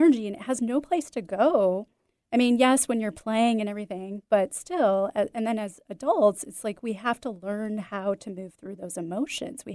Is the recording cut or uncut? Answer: uncut